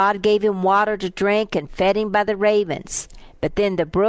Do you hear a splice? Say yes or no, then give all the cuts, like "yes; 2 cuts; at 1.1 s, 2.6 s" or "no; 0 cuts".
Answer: no; 0 cuts